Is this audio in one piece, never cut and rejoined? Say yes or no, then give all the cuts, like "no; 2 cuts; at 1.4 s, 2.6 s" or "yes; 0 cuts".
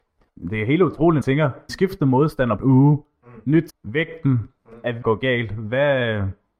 no; 5 cuts; at 1.2 s, 1.7 s, 2.6 s, 3.7 s, 5.0 s